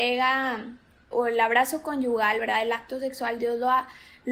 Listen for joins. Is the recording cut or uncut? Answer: cut